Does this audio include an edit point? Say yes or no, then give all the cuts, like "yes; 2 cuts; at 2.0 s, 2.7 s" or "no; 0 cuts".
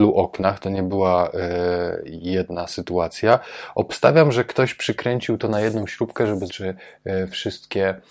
yes; 1 cut; at 6.5 s